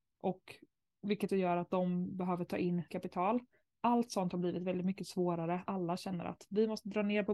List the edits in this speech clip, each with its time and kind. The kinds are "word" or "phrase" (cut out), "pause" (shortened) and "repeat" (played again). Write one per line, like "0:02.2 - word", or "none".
0:01.3 - word
0:02.9 - word
0:05.7 - word

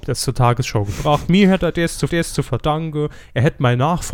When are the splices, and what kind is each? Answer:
0:02.1 - repeat

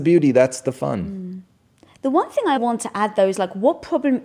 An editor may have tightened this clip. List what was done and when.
0:02.6 - word

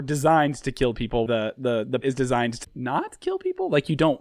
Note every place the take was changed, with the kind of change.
0:01.3 - word
0:02.0 - word
0:02.6 - word

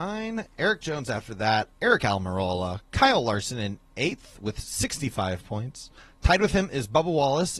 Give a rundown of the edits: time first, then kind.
0:06.0 - pause

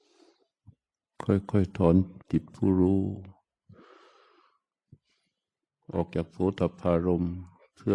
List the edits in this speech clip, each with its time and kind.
0:02.2 - pause

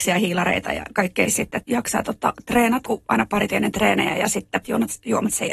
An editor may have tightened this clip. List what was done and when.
0:01.3 - word
0:01.6 - word
0:02.9 - word
0:03.5 - word
0:04.6 - word

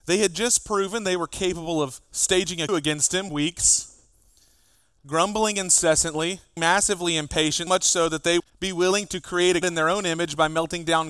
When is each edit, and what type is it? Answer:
0:02.7 - word
0:03.3 - word
0:06.6 - word
0:07.7 - word
0:08.4 - word
0:09.6 - word

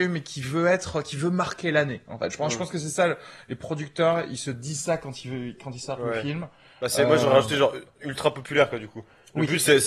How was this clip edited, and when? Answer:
none

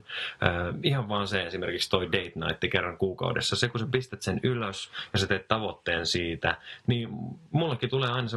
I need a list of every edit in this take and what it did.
none

